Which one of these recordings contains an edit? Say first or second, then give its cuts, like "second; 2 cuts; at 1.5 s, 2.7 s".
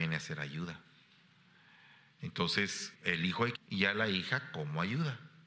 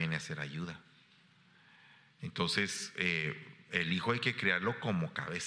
first; 2 cuts; at 2.9 s, 3.5 s